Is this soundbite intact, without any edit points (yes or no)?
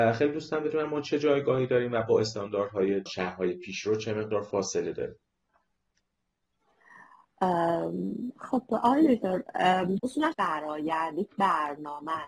no